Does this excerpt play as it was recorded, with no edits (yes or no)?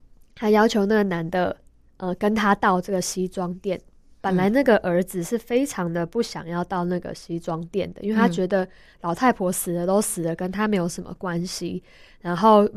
yes